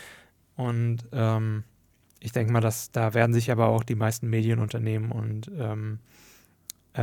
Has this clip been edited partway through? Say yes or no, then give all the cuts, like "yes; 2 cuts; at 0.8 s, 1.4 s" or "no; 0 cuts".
no; 0 cuts